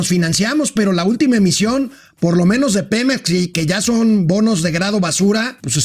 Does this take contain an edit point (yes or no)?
no